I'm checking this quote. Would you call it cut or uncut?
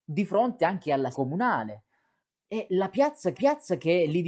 cut